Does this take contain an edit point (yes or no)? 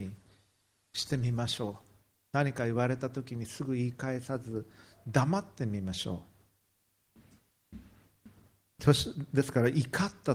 no